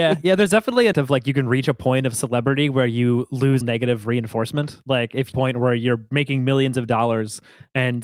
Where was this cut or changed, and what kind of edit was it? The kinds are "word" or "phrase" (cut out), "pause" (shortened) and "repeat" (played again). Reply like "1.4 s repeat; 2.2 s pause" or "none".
0.9 s word; 3.6 s word; 5.3 s phrase